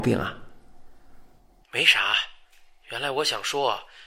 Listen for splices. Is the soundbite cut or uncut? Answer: uncut